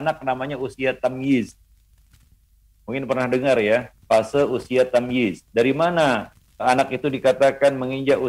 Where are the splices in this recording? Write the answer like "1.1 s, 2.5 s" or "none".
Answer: 4.0 s, 6.6 s